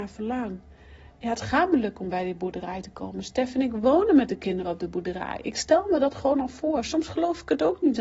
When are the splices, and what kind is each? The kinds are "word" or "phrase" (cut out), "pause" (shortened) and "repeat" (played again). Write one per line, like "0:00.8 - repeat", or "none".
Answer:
none

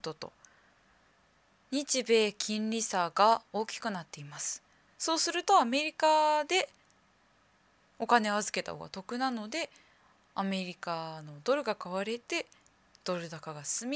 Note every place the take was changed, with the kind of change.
none

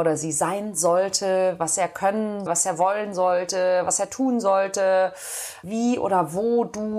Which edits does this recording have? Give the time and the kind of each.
0:02.5 - word
0:05.6 - word

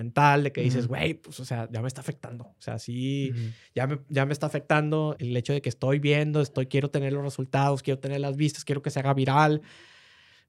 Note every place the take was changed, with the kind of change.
0:05.2 - word

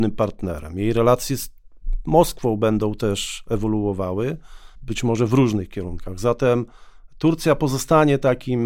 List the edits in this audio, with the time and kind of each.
none

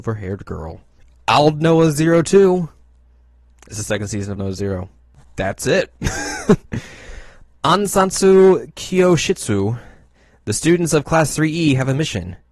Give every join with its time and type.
0:04.4 - word

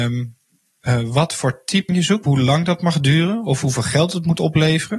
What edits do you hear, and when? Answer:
0:01.9 - word
0:02.2 - word

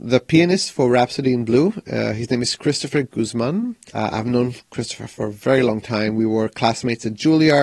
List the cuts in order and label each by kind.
none

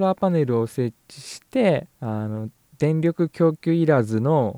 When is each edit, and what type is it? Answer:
0:01.9 - pause
0:02.6 - pause

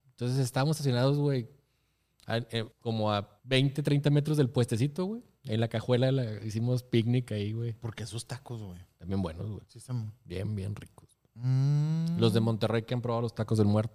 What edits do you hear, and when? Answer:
0:02.7 - pause
0:03.4 - pause
0:11.3 - pause

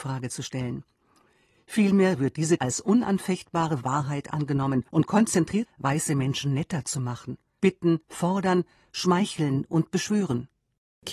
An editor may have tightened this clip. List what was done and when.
0:02.6 - word
0:04.9 - pause
0:05.7 - phrase
0:07.6 - word
0:08.0 - pause

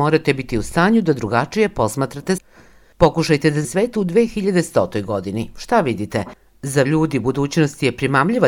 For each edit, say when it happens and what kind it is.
0:02.4 - word
0:03.6 - word
0:06.8 - word

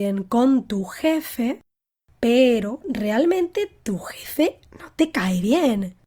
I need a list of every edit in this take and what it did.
none

